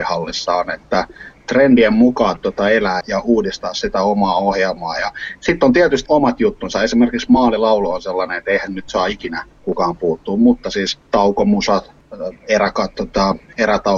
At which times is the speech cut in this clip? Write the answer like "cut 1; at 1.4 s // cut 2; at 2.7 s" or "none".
cut 1; at 2.4 s // cut 2; at 3.0 s // cut 3; at 6.1 s // cut 4; at 8.7 s // cut 5; at 9.5 s // cut 6; at 11.1 s // cut 7; at 12.9 s